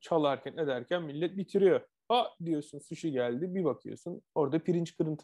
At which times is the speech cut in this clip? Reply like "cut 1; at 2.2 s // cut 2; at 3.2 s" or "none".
cut 1; at 4.3 s